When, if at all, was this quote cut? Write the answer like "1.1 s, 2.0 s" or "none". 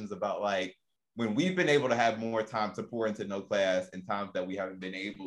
none